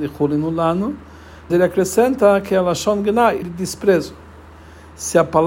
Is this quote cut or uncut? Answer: cut